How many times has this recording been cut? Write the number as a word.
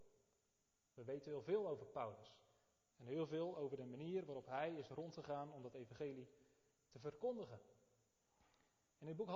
zero